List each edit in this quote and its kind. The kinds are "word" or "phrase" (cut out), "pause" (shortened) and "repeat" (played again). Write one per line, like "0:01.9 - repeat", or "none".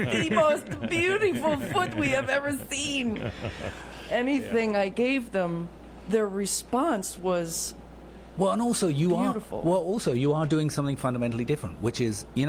none